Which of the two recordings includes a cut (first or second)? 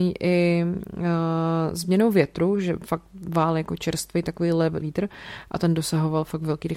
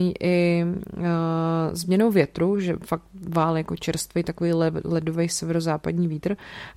first